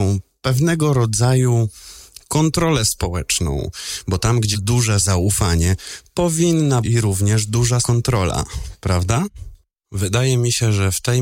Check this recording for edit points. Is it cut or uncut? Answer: cut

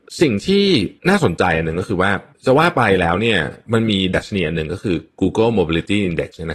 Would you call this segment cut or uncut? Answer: cut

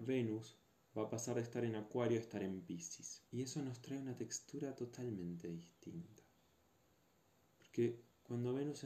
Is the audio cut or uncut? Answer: cut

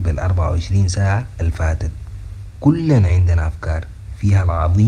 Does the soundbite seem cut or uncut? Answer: uncut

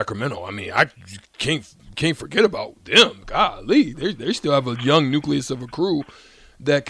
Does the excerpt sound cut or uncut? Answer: uncut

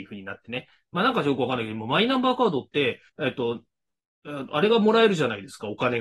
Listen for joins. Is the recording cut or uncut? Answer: cut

